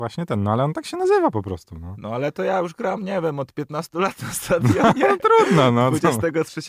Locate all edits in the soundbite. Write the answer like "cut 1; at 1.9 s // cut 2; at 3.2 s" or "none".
none